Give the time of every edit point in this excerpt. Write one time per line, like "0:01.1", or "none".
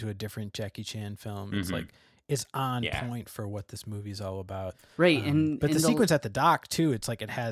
none